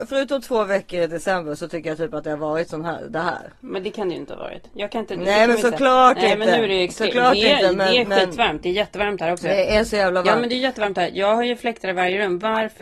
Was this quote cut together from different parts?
no; 0 cuts

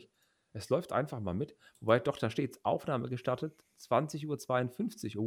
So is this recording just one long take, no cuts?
yes; 0 cuts

